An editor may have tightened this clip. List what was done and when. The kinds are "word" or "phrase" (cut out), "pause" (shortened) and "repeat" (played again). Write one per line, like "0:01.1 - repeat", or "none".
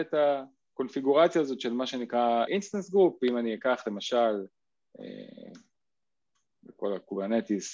0:02.5 - word